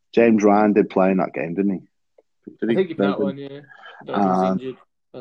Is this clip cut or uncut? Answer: cut